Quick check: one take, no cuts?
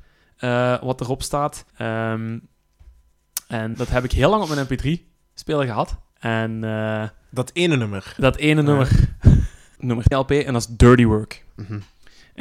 no; 4 cuts; at 1.7 s, 3.7 s, 6.1 s, 10.1 s

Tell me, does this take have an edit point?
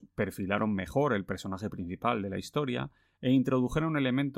no; 0 cuts

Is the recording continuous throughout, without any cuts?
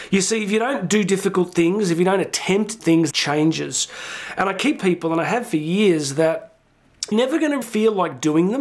no; 5 cuts; at 2.8 s, 3.1 s, 4.8 s, 7.1 s, 7.6 s

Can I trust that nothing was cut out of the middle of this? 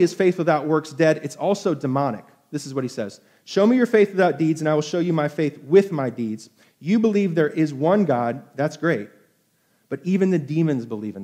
yes; 0 cuts

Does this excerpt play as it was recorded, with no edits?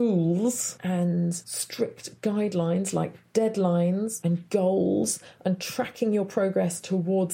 yes; 0 cuts

